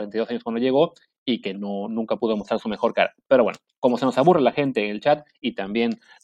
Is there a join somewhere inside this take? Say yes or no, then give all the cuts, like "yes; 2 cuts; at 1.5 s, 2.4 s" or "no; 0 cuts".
no; 0 cuts